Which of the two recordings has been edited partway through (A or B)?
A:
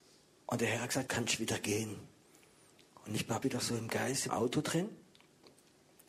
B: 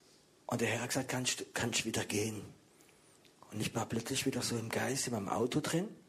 A